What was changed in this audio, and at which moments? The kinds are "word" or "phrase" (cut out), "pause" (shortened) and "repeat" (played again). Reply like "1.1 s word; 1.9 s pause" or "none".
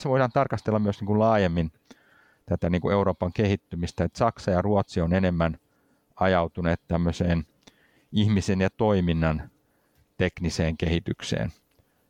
none